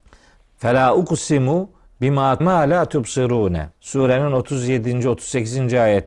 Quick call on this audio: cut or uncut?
cut